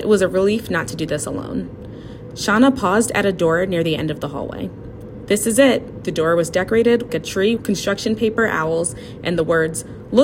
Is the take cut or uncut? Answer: cut